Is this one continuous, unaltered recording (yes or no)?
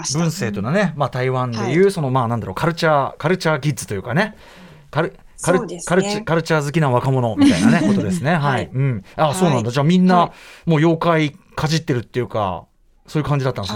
yes